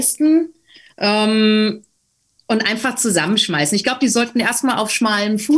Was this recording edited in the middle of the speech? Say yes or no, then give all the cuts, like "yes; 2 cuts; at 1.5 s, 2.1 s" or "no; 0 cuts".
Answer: no; 0 cuts